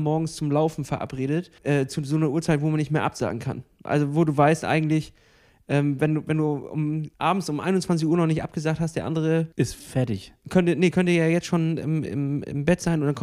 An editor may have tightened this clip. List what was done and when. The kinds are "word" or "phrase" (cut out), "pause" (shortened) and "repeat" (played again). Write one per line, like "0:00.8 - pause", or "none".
0:01.6 - pause
0:07.1 - pause
0:09.5 - pause